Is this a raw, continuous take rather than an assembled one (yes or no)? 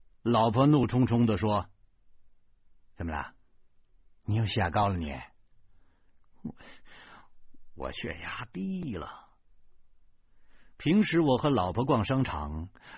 yes